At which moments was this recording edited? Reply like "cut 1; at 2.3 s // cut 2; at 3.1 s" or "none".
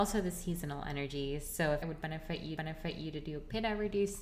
cut 1; at 1.8 s // cut 2; at 2.6 s